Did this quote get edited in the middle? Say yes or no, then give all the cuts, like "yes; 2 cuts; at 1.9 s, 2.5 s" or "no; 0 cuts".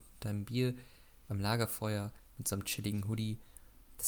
no; 0 cuts